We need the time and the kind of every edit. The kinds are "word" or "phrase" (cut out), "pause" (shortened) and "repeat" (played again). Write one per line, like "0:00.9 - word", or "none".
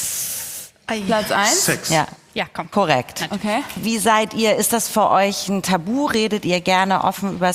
none